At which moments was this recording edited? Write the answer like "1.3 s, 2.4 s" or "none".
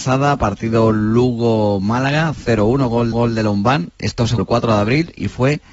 3.1 s, 4.4 s